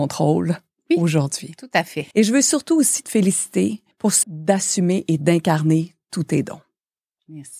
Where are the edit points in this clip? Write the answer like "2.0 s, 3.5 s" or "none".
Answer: 2.1 s, 3.0 s, 3.9 s, 4.2 s